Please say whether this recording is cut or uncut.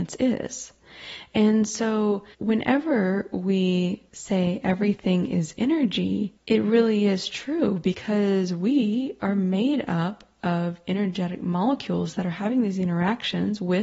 cut